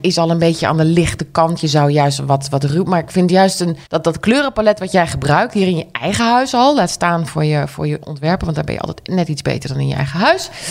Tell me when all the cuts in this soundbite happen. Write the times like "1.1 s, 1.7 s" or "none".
3.9 s